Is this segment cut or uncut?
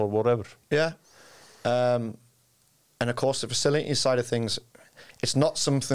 uncut